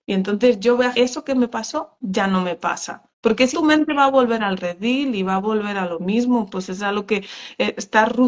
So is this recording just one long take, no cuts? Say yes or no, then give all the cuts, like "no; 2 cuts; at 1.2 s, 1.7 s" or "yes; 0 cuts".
no; 3 cuts; at 0.9 s, 3.1 s, 3.5 s